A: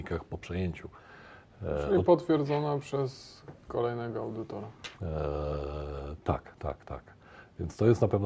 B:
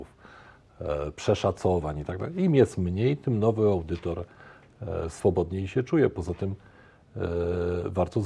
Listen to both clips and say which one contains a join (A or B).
A